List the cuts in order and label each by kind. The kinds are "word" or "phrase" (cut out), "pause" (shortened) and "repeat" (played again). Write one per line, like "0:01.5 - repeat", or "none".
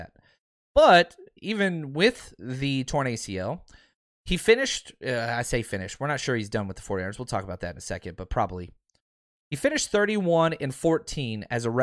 none